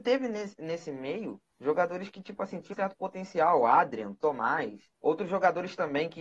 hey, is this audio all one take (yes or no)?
no